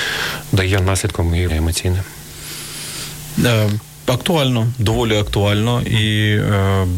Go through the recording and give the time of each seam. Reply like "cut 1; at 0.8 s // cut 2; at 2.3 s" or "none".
cut 1; at 1.5 s